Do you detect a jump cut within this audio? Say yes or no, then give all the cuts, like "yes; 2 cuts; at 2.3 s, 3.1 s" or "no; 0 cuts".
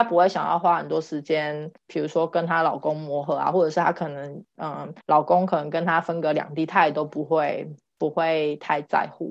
yes; 1 cut; at 5.0 s